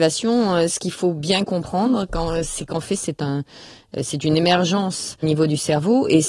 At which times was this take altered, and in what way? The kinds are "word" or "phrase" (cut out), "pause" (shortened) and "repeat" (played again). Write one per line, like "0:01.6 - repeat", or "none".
0:05.2 - word